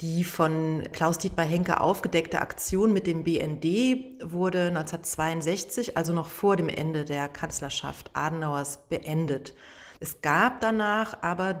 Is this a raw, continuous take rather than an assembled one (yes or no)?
no